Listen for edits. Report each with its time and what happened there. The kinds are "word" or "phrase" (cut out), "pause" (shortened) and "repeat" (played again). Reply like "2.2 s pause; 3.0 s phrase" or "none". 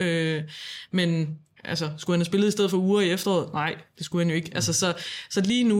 1.6 s pause

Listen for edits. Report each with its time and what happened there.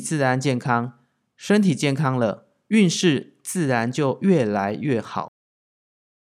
none

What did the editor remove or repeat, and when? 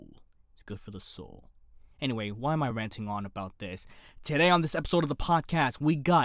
none

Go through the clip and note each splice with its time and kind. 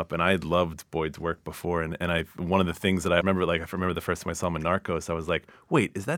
3.2 s word

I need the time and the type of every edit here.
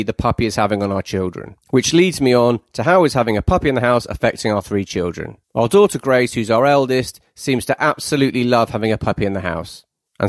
1.6 s pause; 5.4 s pause

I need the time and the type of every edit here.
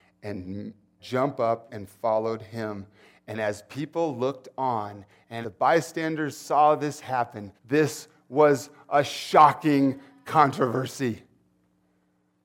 1.0 s phrase; 1.7 s word; 5.4 s phrase; 7.6 s pause

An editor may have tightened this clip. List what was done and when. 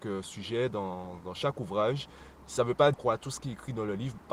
2.9 s phrase

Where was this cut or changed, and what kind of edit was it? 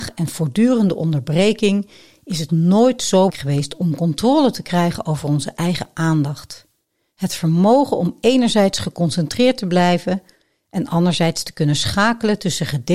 2.5 s word; 3.3 s word

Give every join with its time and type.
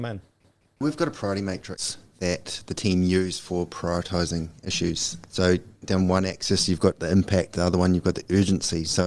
none

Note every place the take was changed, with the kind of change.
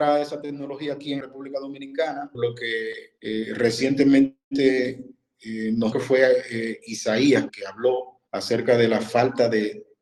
1.2 s word; 2.3 s word; 3.2 s pause; 5.9 s phrase; 7.5 s word; 8.3 s pause

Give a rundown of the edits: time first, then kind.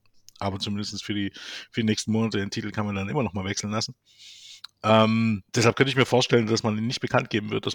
5.5 s pause

